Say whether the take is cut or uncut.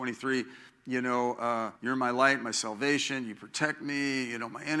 cut